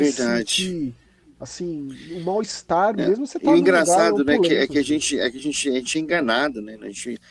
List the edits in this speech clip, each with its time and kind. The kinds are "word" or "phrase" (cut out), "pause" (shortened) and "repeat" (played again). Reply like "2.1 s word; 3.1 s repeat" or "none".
none